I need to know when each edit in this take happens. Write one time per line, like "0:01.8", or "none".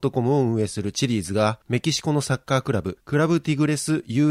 none